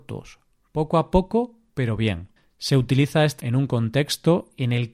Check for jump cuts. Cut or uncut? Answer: cut